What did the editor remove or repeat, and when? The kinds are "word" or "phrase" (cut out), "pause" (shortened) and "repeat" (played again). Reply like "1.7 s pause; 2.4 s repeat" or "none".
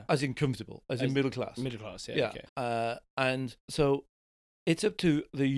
2.5 s pause; 3.6 s pause